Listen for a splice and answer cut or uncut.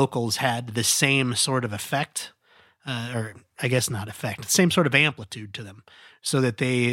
uncut